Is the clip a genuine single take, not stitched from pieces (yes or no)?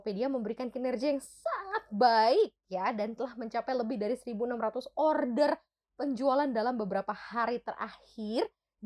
yes